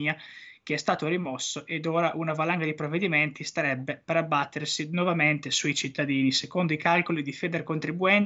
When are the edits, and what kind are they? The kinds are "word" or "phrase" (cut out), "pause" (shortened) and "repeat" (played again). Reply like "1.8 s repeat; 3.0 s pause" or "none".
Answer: none